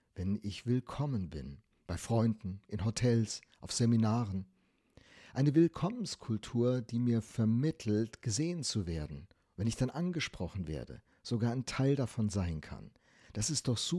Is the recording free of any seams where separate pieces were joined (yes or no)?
yes